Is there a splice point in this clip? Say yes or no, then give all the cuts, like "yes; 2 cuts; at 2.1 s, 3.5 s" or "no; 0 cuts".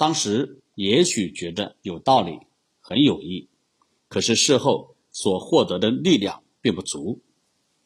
no; 0 cuts